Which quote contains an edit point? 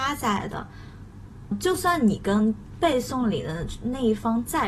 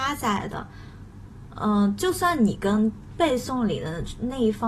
first; 1 cut; at 1.5 s

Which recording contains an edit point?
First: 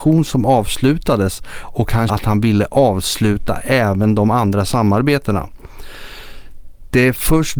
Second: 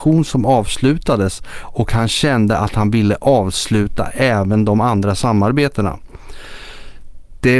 first; 1 cut; at 2.1 s

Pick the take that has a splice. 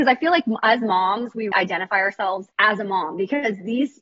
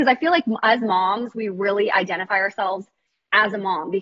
first; 2 cuts; at 1.5 s, 2.5 s

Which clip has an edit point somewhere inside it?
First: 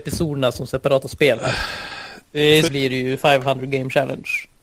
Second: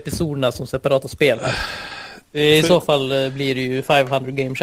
first; 1 cut; at 2.7 s

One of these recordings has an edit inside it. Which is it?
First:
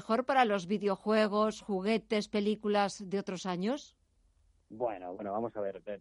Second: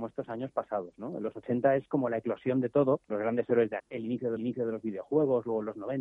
second; 3 cuts; at 3.0 s, 3.8 s, 4.4 s

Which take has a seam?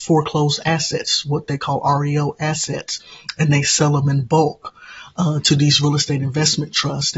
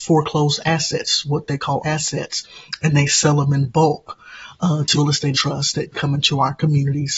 second; 4 cuts; at 1.8 s, 4.9 s, 5.3 s, 5.9 s

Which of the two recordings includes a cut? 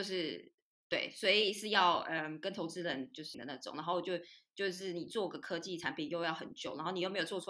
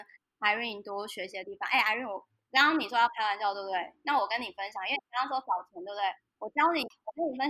first; 1 cut; at 3.3 s

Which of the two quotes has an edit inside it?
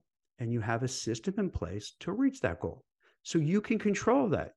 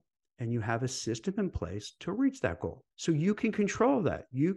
second; 1 cut; at 2.9 s

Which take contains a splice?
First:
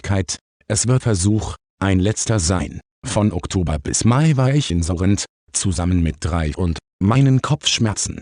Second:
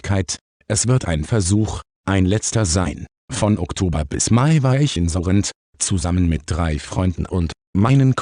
first; 2 cuts; at 1.0 s, 6.5 s

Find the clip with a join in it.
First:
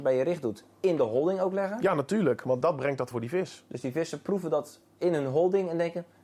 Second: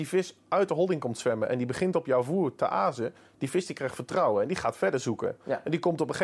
first; 2 cuts; at 2.6 s, 3.1 s

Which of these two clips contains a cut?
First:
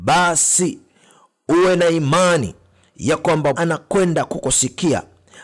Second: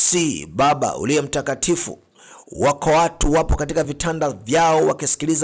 first; 1 cut; at 3.5 s

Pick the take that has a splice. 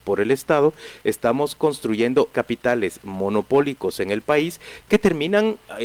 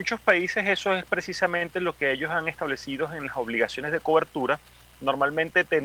first; 1 cut; at 2.3 s

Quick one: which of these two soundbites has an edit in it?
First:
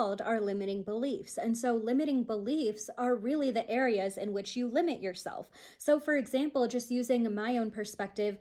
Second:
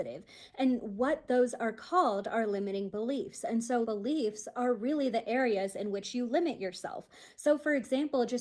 second; 1 cut; at 3.8 s

